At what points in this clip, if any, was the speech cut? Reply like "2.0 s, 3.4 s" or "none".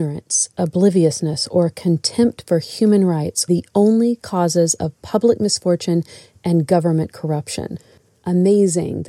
3.5 s